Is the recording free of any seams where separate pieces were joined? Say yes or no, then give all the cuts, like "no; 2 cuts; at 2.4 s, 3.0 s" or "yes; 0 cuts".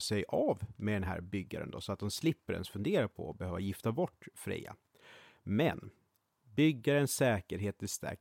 yes; 0 cuts